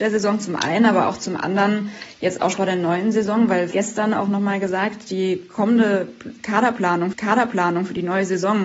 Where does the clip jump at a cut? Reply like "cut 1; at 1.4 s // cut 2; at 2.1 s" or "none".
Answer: cut 1; at 2.5 s // cut 2; at 3.7 s // cut 3; at 7.1 s